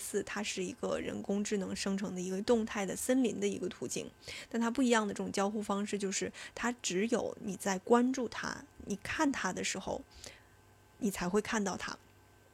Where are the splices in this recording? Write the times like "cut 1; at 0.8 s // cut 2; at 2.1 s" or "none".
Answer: none